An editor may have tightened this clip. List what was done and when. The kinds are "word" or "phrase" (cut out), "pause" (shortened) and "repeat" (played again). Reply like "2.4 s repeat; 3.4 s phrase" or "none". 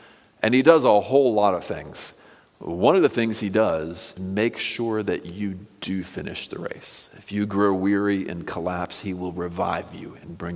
4.2 s word

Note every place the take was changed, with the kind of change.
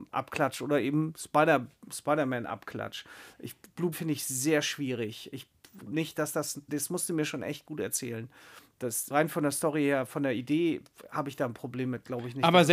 3.9 s word; 5.9 s word; 6.7 s word; 9.1 s word

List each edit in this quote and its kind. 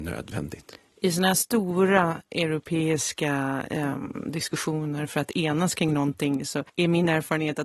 6.7 s pause

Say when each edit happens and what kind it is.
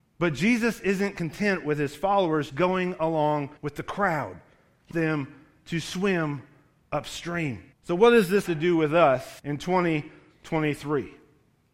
2.5 s word; 3.6 s pause; 4.9 s word; 7.7 s pause; 8.5 s word; 9.4 s pause

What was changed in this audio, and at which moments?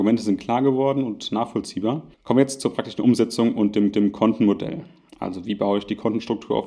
2.1 s pause; 3.9 s repeat

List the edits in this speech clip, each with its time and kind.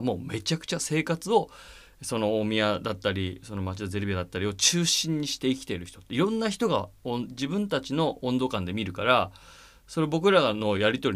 none

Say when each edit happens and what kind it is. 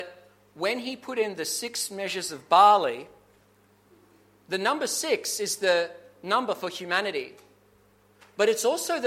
none

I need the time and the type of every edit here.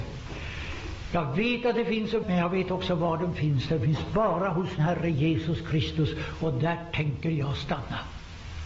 2.2 s word; 4.8 s word

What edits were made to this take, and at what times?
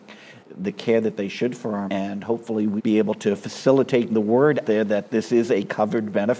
1.9 s word; 2.8 s word; 4.1 s word; 4.6 s word

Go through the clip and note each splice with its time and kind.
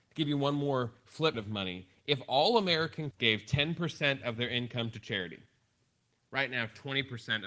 1.3 s word; 3.1 s word

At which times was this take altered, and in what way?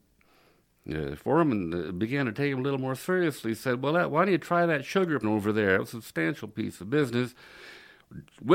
5.2 s word

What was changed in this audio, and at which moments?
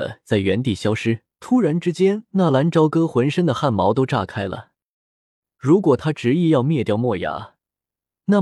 1.3 s pause

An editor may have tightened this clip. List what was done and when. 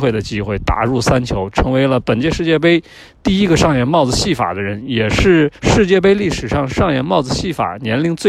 5.6 s pause

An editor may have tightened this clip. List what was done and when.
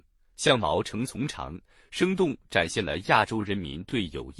none

